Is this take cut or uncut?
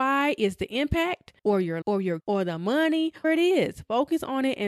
cut